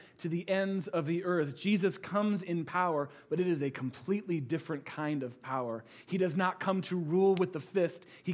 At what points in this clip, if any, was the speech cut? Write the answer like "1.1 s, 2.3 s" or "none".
none

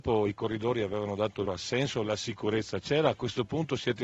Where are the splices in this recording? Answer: 1.5 s

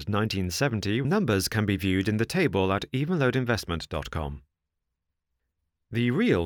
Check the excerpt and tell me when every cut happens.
1.0 s

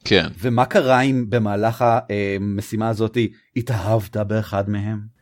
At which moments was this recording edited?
none

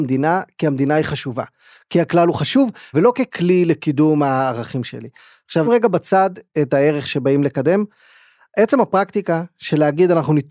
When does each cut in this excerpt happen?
2.9 s, 5.6 s

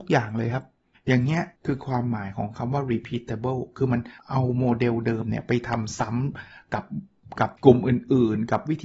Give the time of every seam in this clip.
0.9 s, 1.6 s, 4.2 s, 7.6 s

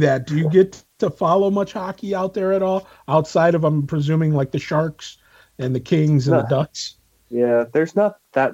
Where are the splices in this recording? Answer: none

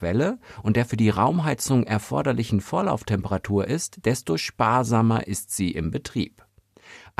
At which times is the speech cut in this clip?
none

